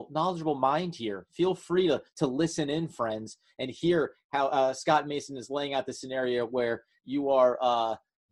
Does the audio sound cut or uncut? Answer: uncut